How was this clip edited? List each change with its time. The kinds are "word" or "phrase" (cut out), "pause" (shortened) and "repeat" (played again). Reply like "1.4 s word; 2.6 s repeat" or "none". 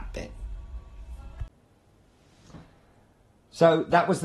none